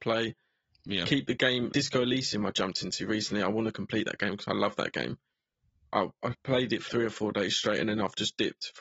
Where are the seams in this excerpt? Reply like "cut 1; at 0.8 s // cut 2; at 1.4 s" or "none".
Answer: cut 1; at 1.7 s // cut 2; at 6.9 s